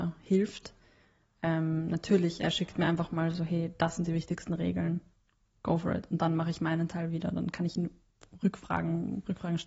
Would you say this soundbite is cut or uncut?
uncut